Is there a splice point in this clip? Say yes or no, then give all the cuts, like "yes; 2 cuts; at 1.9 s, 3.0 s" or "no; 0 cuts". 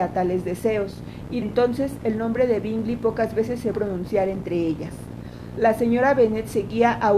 yes; 2 cuts; at 1.4 s, 3.7 s